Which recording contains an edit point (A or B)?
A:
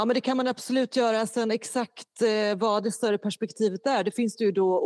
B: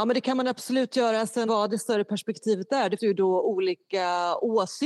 B